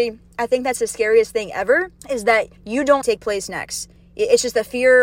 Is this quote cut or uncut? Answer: cut